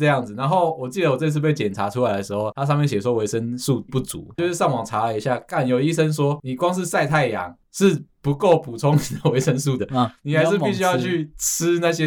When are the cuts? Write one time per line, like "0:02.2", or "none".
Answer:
0:03.9
0:09.8